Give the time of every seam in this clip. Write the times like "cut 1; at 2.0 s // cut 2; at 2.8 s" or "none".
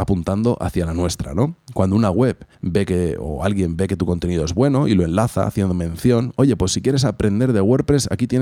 cut 1; at 2.5 s

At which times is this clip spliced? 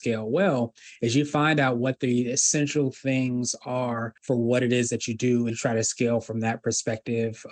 cut 1; at 4.2 s // cut 2; at 5.5 s

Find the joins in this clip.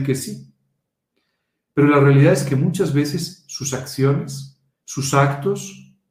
cut 1; at 4.7 s

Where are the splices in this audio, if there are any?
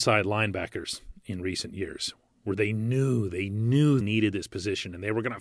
cut 1; at 4.0 s

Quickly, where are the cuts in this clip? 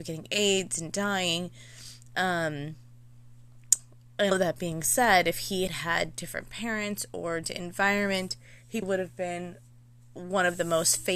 cut 1; at 4.3 s // cut 2; at 5.7 s // cut 3; at 7.4 s // cut 4; at 8.8 s

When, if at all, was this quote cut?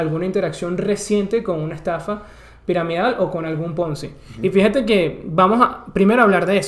none

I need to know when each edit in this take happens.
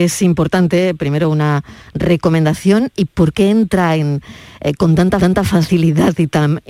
cut 1; at 5.2 s

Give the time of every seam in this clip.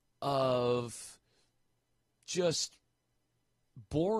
none

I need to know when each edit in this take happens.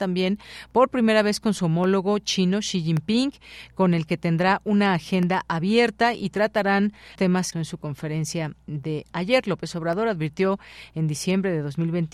cut 1; at 7.2 s // cut 2; at 7.5 s

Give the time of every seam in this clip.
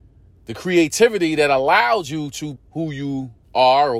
cut 1; at 2.6 s

